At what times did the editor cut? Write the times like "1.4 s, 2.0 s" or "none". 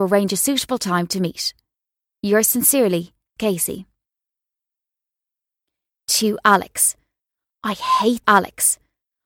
3.4 s, 8.2 s